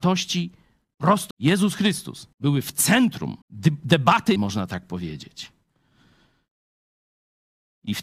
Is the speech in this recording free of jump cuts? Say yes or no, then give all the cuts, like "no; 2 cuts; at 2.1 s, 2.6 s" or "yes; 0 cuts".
no; 4 cuts; at 1.3 s, 2.3 s, 3.4 s, 4.4 s